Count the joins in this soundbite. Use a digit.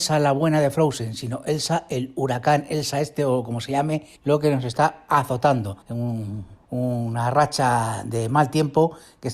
3